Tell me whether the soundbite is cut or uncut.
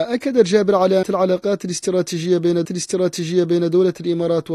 cut